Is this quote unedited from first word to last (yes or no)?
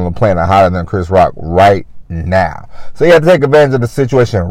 yes